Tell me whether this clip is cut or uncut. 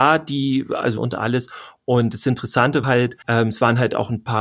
cut